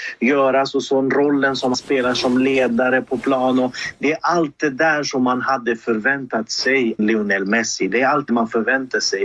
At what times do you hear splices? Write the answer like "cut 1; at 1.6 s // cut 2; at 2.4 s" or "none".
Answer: cut 1; at 1.7 s // cut 2; at 7.0 s // cut 3; at 8.3 s